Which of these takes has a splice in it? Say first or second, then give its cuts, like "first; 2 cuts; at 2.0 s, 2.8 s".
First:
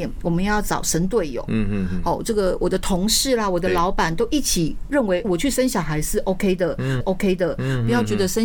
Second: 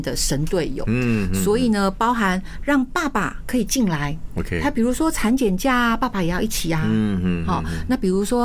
first; 2 cuts; at 5.2 s, 7.0 s